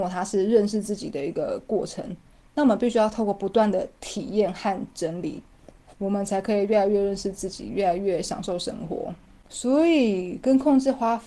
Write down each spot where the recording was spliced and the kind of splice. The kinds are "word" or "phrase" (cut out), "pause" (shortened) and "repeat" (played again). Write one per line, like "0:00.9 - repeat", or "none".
none